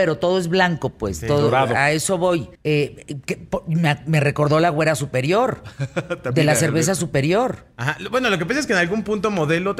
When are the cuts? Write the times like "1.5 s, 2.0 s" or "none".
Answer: 2.6 s